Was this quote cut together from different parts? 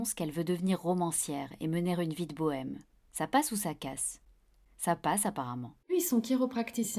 no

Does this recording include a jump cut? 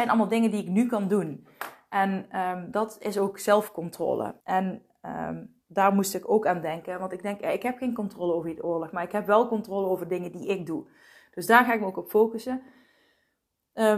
yes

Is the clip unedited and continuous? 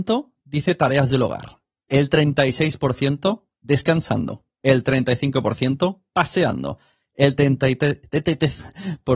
yes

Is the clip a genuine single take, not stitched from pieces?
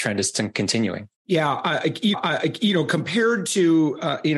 no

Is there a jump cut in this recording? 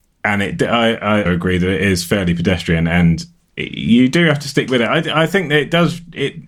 yes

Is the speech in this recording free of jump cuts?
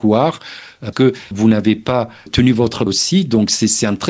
no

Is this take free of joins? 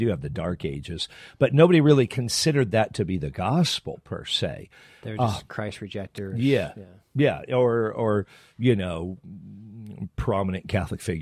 yes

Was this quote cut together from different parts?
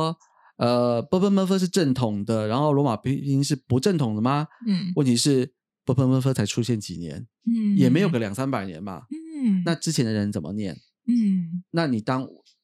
no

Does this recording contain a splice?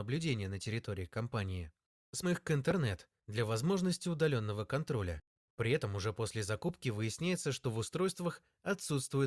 yes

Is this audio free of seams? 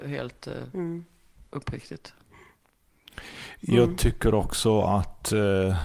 yes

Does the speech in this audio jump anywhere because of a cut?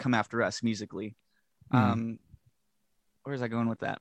no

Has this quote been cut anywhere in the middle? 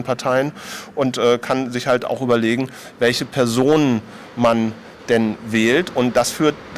no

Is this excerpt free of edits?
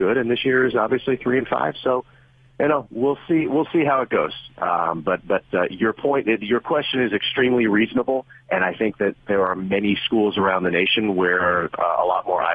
yes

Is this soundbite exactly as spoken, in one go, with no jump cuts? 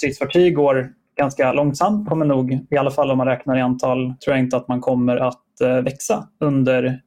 no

